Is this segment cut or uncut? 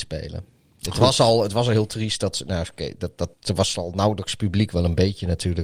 cut